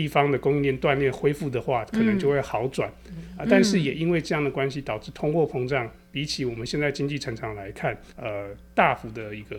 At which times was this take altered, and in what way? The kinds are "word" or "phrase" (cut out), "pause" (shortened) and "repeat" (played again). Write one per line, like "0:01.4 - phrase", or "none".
0:08.1 - pause